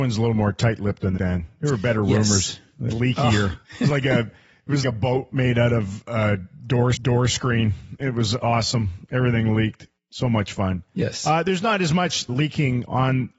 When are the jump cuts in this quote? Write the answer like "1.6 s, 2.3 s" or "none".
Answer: 1.2 s, 2.9 s, 3.6 s, 4.8 s, 6.9 s, 10.0 s, 12.3 s